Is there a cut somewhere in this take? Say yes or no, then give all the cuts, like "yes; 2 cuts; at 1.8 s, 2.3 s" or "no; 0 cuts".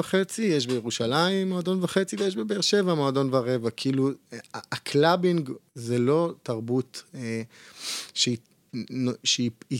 yes; 1 cut; at 5.7 s